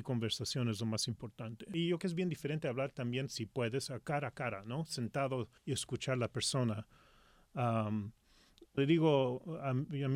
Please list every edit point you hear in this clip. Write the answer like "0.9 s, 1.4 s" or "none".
2.0 s, 5.6 s, 8.8 s